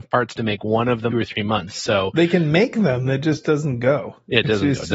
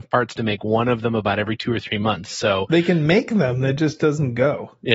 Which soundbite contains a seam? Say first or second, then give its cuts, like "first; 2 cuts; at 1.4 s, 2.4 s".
first; 1 cut; at 1.1 s